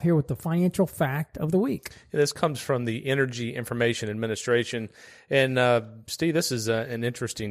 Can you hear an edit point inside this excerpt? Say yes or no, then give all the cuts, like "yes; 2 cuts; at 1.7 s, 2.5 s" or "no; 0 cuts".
no; 0 cuts